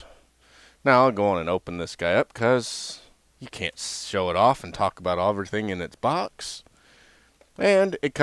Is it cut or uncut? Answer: uncut